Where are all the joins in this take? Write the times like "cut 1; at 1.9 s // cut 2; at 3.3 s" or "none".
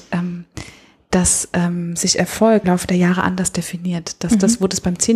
cut 1; at 2.6 s